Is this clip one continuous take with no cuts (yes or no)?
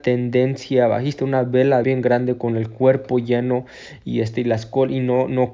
no